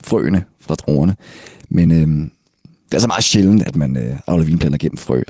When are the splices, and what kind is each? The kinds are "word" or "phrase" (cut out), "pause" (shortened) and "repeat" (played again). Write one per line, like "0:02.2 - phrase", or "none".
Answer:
none